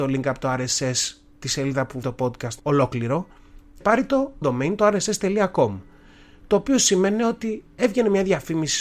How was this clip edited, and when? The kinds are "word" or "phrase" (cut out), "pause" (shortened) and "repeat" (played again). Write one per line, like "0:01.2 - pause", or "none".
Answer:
0:02.0 - word
0:02.6 - word
0:03.8 - word
0:04.4 - word